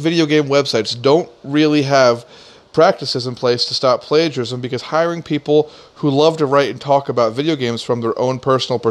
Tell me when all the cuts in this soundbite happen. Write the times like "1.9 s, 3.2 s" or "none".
none